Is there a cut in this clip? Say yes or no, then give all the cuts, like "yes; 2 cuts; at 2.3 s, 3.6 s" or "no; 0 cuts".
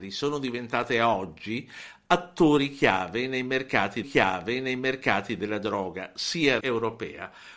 yes; 2 cuts; at 4.0 s, 6.6 s